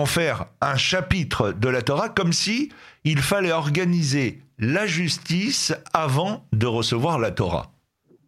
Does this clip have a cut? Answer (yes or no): no